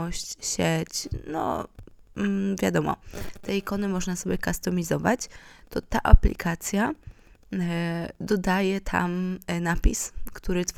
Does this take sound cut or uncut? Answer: uncut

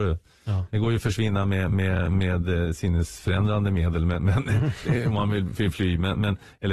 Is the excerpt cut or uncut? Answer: uncut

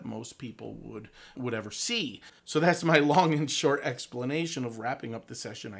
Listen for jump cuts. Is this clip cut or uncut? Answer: cut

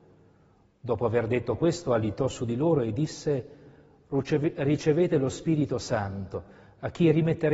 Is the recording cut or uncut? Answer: uncut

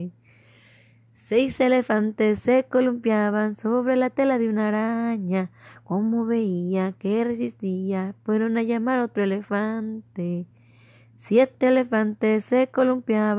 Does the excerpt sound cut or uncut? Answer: uncut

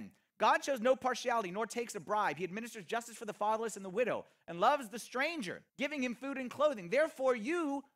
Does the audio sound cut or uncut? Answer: cut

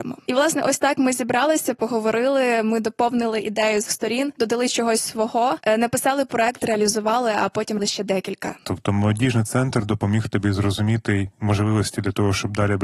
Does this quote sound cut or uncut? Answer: cut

